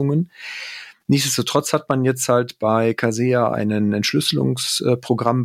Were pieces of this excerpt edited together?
no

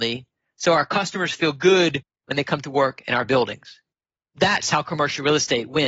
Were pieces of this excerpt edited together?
no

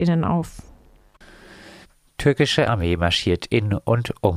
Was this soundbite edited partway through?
no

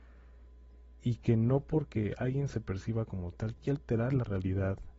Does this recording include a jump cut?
yes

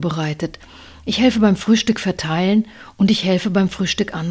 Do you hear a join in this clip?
no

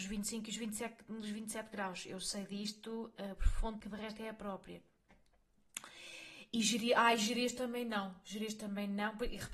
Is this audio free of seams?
no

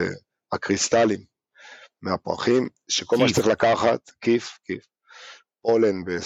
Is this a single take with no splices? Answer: no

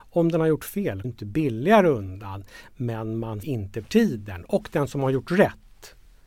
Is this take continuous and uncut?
no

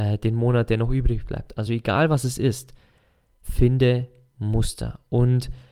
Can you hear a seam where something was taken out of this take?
no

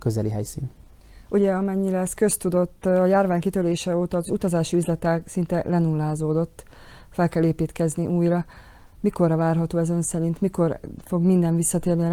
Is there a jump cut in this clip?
no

